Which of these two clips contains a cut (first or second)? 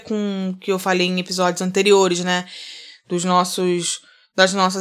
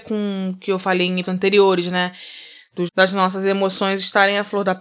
second